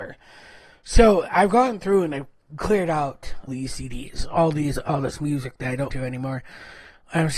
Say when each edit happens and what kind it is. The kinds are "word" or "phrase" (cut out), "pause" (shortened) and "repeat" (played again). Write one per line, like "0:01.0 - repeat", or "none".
0:03.5 - word
0:05.9 - word